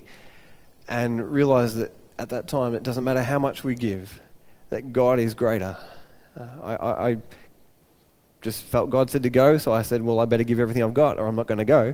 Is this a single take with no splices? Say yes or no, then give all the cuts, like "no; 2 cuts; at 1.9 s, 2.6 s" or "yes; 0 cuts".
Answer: yes; 0 cuts